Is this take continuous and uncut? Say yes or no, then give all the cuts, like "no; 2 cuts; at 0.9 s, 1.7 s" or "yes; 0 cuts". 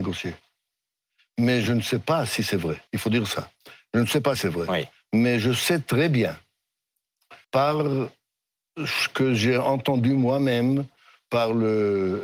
no; 3 cuts; at 2.9 s, 4.4 s, 7.4 s